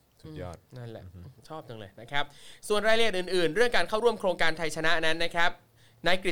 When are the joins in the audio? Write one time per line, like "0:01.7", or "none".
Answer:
0:01.4